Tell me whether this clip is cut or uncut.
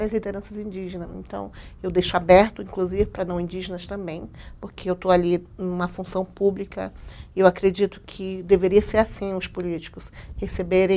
uncut